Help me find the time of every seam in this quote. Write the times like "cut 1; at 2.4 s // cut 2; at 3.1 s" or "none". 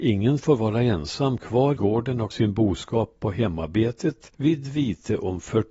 cut 1; at 1.8 s // cut 2; at 2.3 s // cut 3; at 4.3 s